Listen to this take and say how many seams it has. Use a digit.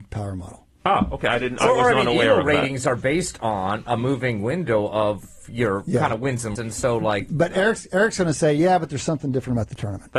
1